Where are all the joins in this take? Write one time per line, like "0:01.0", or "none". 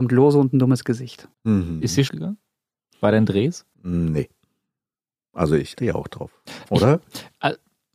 0:01.3
0:02.1
0:03.7
0:05.8